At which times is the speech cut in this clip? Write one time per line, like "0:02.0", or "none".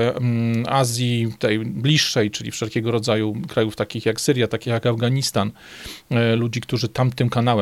none